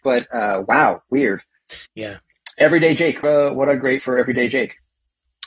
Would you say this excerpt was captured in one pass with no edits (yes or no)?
no